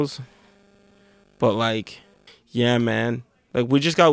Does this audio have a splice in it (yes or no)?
yes